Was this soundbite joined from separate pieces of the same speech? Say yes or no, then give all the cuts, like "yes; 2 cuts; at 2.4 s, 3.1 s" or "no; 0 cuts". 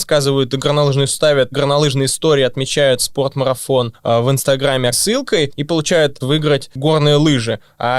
yes; 5 cuts; at 1.1 s, 1.5 s, 3.0 s, 4.9 s, 6.2 s